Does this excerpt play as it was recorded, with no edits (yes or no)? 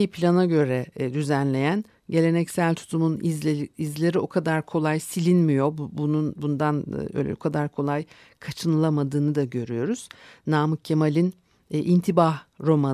yes